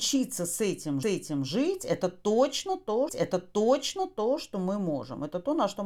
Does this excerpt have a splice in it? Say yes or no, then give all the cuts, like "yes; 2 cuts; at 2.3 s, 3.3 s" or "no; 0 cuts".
yes; 2 cuts; at 1.0 s, 3.1 s